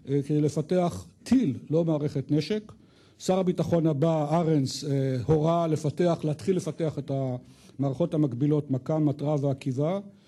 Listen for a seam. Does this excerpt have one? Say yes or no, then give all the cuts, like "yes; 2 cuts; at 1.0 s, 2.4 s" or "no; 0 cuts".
no; 0 cuts